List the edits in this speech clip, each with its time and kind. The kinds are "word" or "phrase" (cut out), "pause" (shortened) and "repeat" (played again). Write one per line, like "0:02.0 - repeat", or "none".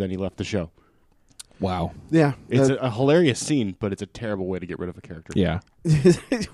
none